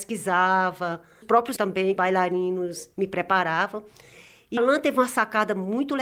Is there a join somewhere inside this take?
yes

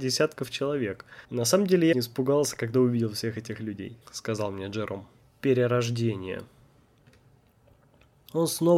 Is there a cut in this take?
yes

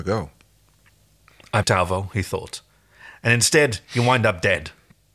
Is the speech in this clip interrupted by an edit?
yes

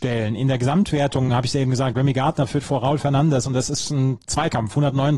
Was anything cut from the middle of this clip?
no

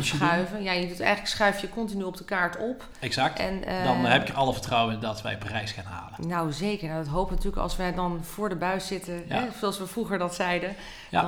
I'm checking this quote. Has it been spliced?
no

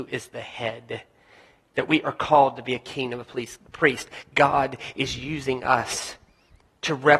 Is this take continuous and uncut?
yes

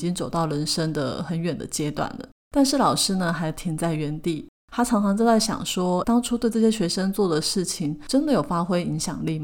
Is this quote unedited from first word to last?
no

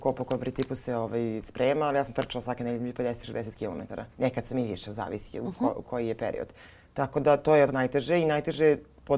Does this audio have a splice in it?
yes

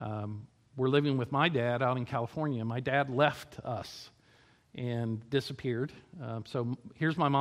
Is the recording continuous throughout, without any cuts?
yes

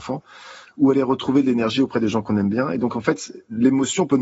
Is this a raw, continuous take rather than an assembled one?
yes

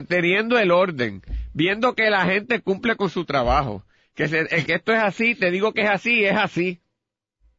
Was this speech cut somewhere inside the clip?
yes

